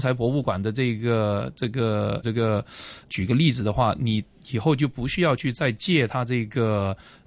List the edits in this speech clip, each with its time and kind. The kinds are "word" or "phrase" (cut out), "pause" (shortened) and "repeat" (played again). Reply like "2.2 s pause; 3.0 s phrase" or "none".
2.2 s word; 3.0 s word